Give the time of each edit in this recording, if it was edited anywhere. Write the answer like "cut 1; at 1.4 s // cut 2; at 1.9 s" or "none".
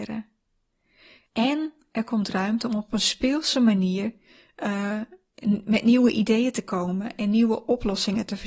none